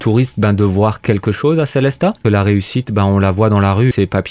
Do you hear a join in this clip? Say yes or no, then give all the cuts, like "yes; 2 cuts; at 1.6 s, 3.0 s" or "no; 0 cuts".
no; 0 cuts